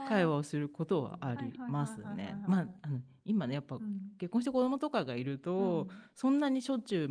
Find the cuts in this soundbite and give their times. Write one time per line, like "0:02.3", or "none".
none